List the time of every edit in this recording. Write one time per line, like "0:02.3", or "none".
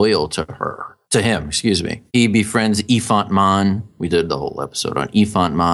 0:01.0
0:02.1